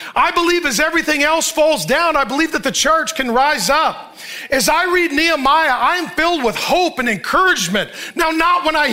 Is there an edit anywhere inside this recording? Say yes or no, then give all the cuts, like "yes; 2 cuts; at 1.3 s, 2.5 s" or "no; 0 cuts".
no; 0 cuts